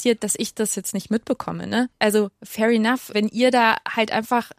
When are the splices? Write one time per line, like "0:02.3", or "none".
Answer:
0:03.1